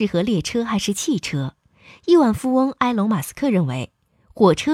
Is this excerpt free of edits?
yes; 0 cuts

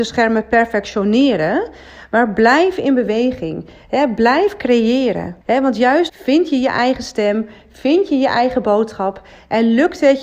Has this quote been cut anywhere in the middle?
yes; 2 cuts; at 5.4 s, 6.1 s

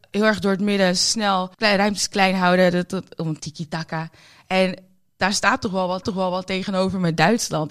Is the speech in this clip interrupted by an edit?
yes; 3 cuts; at 1.5 s, 3.4 s, 6.0 s

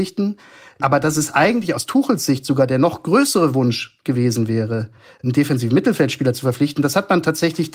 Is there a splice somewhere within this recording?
no; 0 cuts

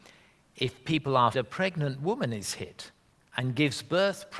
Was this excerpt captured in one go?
no; 1 cut; at 1.3 s

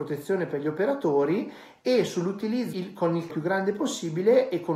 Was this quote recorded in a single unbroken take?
no; 2 cuts; at 2.7 s, 3.3 s

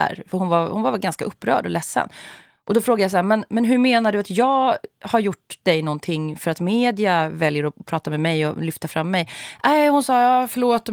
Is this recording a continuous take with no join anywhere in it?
yes; 0 cuts

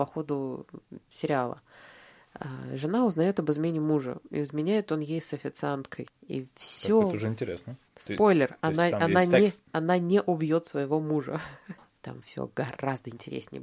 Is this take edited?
no; 0 cuts

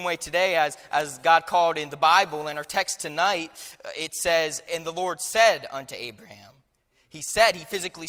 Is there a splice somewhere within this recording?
no; 0 cuts

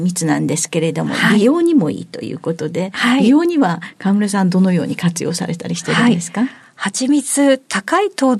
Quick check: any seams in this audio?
no; 0 cuts

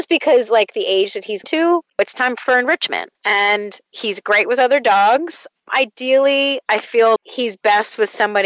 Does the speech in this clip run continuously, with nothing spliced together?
no; 3 cuts; at 1.4 s, 1.9 s, 7.2 s

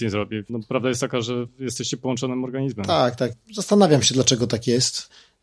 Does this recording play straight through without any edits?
yes; 0 cuts

